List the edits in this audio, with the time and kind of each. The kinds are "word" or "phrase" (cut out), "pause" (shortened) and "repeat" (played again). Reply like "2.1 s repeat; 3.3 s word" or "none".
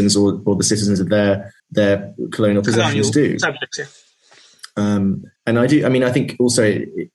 1.6 s pause; 5.4 s pause